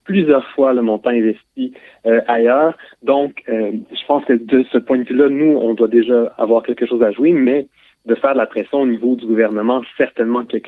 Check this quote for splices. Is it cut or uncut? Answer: uncut